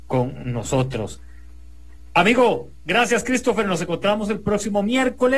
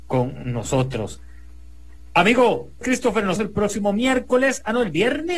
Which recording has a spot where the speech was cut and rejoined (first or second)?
second